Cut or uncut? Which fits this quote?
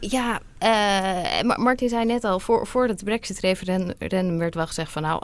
uncut